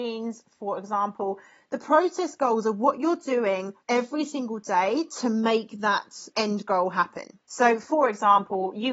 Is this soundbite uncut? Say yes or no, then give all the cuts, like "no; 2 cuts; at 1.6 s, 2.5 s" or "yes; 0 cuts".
no; 3 cuts; at 3.8 s, 6.3 s, 7.4 s